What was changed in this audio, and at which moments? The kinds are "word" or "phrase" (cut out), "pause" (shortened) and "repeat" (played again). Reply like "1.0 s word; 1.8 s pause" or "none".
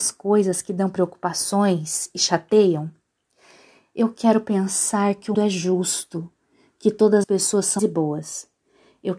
5.3 s word; 7.2 s word; 7.8 s word